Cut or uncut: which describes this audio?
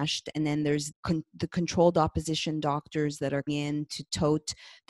cut